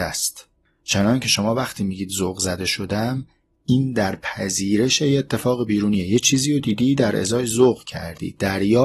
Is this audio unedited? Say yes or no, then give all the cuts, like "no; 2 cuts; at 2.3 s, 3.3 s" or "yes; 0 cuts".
yes; 0 cuts